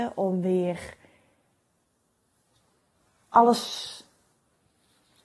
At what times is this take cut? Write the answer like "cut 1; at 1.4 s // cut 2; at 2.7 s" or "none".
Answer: none